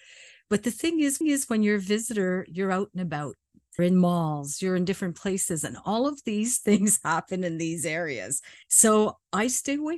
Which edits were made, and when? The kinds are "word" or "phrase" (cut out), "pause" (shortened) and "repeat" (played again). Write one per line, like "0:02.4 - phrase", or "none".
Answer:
0:01.2 - repeat
0:03.8 - word
0:08.6 - pause